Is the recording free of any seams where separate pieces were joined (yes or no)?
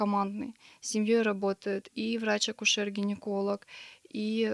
yes